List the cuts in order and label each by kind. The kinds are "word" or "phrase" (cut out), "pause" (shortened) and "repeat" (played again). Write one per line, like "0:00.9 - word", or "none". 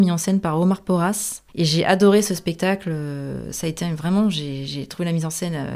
0:01.5 - pause